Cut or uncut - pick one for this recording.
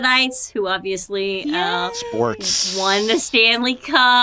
uncut